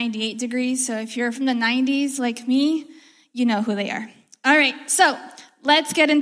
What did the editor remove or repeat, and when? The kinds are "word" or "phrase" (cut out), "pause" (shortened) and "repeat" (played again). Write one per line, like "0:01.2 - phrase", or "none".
none